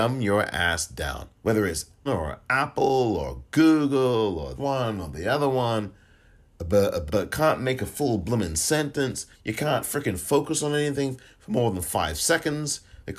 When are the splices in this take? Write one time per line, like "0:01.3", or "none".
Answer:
0:01.4
0:02.1
0:04.6
0:07.1
0:09.3